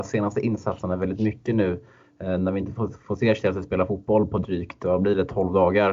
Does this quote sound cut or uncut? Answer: uncut